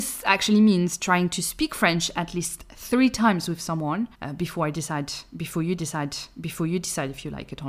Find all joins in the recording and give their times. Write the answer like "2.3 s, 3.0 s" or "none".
4.1 s, 5.8 s